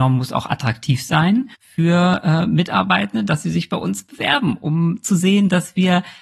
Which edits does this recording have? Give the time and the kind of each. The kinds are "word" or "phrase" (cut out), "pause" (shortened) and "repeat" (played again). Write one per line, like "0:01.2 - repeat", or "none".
0:01.5 - pause